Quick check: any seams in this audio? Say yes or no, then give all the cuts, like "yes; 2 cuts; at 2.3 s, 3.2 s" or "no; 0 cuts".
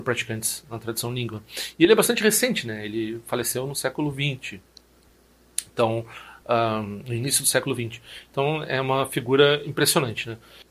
no; 0 cuts